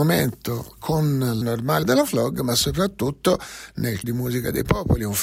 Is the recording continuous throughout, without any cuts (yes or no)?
no